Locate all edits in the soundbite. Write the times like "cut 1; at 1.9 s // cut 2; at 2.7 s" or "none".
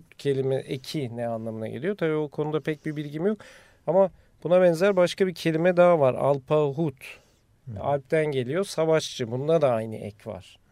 none